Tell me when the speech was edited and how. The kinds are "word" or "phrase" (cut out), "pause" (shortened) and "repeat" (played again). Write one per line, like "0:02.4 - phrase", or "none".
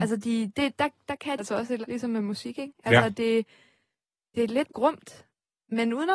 0:01.4 - word
0:01.8 - word
0:04.7 - word